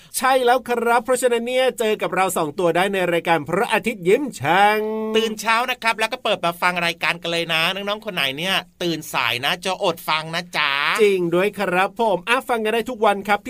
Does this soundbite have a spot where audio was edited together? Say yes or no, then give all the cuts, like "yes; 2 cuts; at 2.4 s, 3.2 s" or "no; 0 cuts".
no; 0 cuts